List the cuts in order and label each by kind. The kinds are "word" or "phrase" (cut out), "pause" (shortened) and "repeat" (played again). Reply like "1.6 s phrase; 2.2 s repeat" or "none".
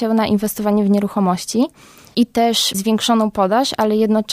2.7 s word